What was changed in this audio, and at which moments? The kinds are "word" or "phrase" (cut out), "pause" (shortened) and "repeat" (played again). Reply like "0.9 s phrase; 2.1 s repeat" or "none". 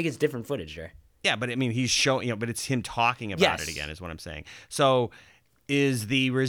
none